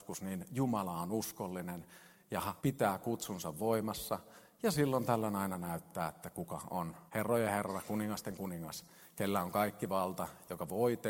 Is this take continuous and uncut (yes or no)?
no